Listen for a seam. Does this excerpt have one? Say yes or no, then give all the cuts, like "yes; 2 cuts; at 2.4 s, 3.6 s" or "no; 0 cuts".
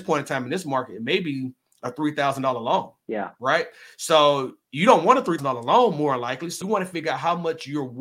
yes; 2 cuts; at 5.4 s, 6.6 s